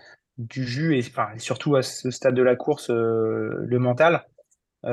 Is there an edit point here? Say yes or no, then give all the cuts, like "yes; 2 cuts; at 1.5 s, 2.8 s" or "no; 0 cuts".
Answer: no; 0 cuts